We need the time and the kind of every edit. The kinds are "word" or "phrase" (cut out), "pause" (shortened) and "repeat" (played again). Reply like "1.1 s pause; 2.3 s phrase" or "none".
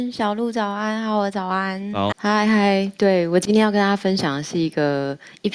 2.1 s word